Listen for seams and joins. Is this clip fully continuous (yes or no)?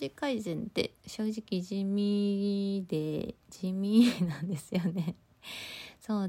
no